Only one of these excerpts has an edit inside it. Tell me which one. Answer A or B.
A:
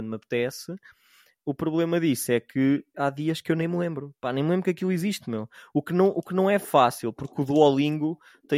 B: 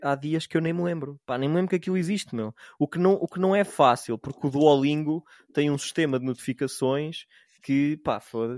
A